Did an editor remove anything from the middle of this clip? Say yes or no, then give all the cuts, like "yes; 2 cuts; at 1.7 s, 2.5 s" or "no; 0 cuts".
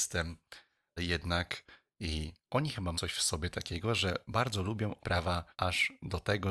yes; 5 cuts; at 1.0 s, 2.4 s, 2.9 s, 5.0 s, 5.5 s